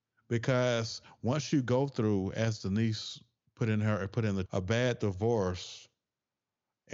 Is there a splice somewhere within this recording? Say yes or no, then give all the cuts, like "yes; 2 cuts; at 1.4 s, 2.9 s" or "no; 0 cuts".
yes; 2 cuts; at 3.4 s, 4.5 s